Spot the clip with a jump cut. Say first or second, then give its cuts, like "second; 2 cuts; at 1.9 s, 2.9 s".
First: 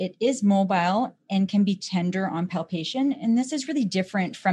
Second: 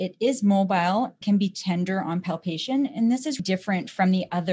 second; 2 cuts; at 1.2 s, 3.4 s